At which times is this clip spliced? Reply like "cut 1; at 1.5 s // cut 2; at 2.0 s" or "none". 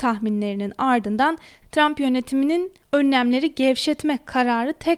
none